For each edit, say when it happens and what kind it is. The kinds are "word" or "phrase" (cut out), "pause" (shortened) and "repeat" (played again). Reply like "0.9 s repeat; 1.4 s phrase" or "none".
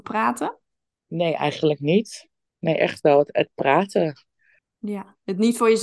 none